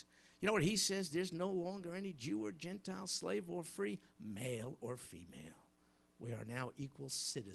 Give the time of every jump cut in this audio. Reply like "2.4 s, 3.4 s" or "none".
none